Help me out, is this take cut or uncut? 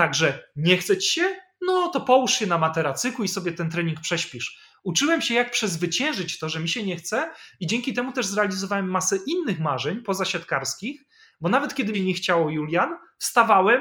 cut